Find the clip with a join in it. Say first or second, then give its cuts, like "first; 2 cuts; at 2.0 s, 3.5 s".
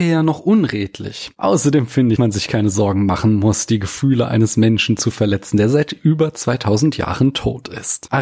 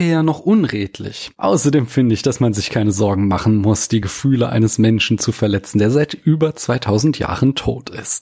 first; 1 cut; at 2.2 s